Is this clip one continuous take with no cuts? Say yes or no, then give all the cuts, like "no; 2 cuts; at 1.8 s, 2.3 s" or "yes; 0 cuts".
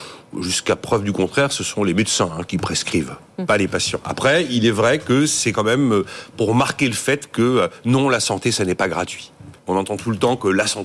no; 1 cut; at 9.6 s